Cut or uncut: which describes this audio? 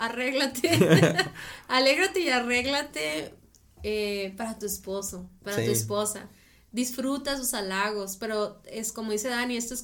uncut